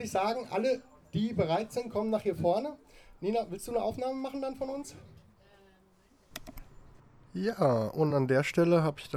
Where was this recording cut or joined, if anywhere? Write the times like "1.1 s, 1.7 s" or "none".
none